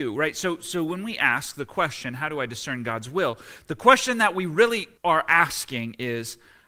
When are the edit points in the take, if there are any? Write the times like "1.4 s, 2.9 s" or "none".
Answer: 5.0 s

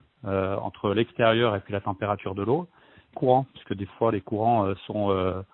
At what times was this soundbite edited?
3.1 s

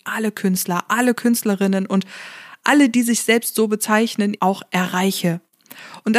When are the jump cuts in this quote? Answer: 4.4 s

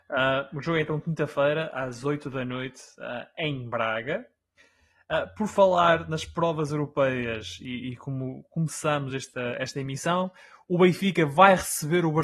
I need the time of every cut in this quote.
none

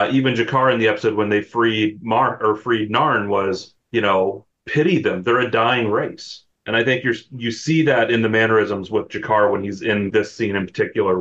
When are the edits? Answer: 10.1 s

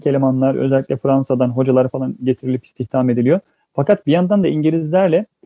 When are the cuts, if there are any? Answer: none

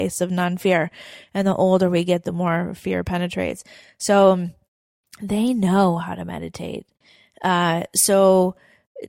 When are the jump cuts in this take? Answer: none

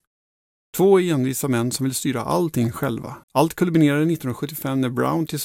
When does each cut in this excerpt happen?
3.2 s

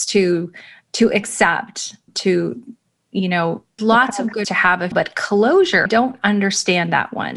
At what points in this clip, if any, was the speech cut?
2.1 s, 3.8 s, 4.4 s, 4.9 s, 5.9 s

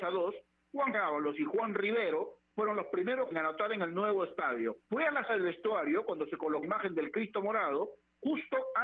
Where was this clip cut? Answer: 0.9 s, 3.3 s, 4.8 s, 5.3 s, 6.6 s

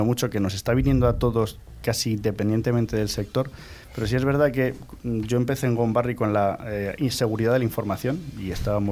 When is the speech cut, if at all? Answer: none

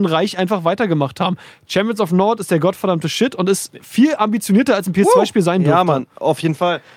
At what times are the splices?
none

